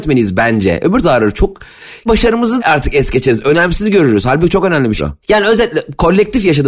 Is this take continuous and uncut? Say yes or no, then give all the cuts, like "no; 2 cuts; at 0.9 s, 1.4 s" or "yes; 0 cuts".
no; 4 cuts; at 1.0 s, 2.1 s, 2.6 s, 5.0 s